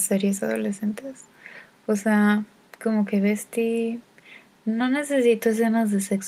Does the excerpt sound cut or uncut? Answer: uncut